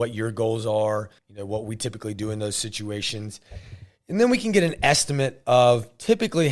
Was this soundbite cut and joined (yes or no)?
yes